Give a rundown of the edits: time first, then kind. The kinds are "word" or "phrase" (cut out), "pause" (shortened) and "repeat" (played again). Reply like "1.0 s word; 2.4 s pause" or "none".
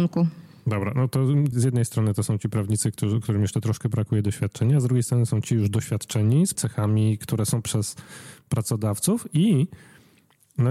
1.5 s word; 6.5 s word; 7.6 s word

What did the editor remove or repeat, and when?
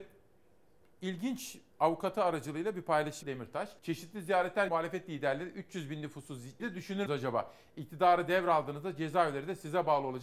1.7 s pause; 3.2 s word; 3.8 s pause; 4.7 s word; 6.6 s phrase; 7.1 s word

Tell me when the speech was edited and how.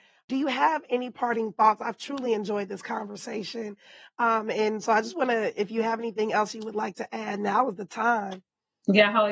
none

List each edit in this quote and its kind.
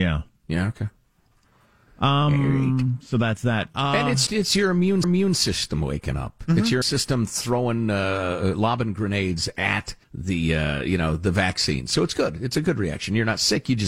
4.3 s word; 5.0 s repeat; 6.8 s word; 10.0 s pause

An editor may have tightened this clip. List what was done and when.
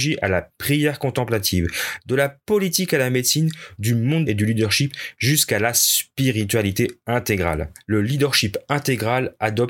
4.3 s phrase

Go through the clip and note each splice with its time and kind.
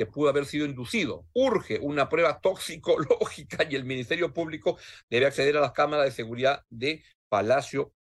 none

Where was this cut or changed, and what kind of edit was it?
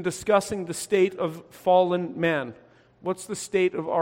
none

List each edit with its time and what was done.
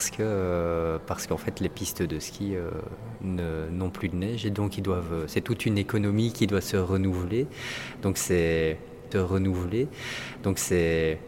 9.1 s repeat

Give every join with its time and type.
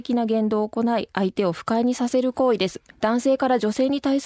2.9 s pause

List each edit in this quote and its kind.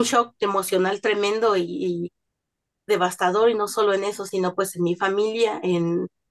none

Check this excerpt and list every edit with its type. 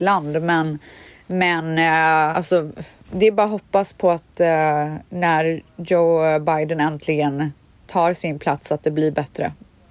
2.3 s word

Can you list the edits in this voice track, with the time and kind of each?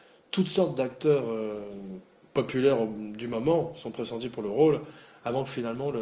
none

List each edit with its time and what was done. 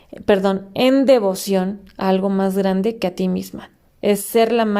none

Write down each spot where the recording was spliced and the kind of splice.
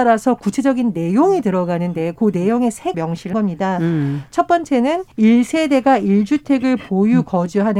2.9 s word; 3.3 s word; 5.1 s pause

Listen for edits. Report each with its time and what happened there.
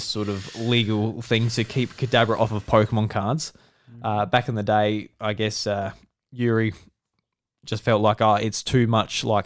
none

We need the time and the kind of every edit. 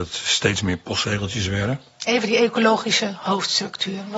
none

